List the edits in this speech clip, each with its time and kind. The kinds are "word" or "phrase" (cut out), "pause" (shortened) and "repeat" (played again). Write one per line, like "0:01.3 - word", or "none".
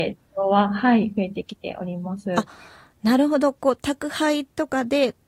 none